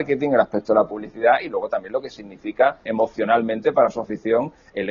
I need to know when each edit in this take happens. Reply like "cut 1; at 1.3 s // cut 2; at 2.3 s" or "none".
cut 1; at 2.9 s